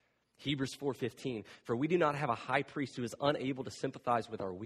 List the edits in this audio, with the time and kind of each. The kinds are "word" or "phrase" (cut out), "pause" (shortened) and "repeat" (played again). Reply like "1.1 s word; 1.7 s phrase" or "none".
none